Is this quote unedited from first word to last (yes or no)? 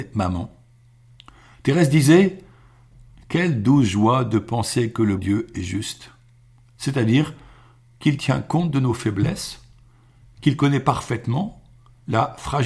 no